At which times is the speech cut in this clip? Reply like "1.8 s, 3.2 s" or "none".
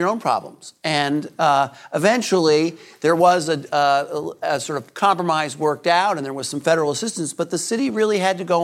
none